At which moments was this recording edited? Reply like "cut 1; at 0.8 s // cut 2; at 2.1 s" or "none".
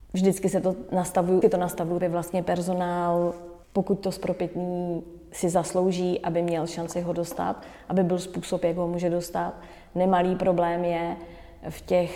cut 1; at 1.4 s // cut 2; at 2.0 s // cut 3; at 3.6 s